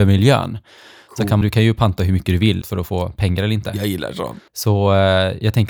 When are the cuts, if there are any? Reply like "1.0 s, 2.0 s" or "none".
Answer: 1.4 s, 2.6 s, 4.5 s

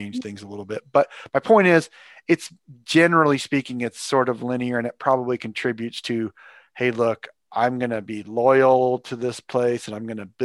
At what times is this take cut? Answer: none

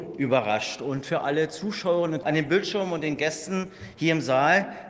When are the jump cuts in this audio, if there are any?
2.2 s

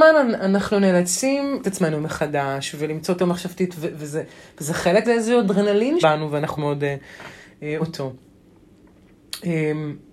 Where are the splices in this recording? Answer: 1.6 s, 3.2 s, 3.7 s, 5.0 s, 6.0 s, 6.6 s, 7.8 s

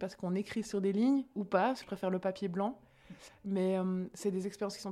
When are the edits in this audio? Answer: 1.3 s, 1.8 s

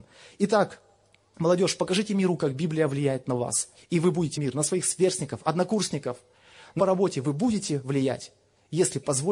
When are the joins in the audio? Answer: 3.7 s, 4.3 s, 6.8 s

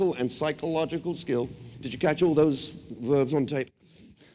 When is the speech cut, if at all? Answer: 1.7 s

